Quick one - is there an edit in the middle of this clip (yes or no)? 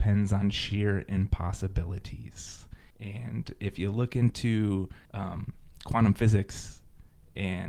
yes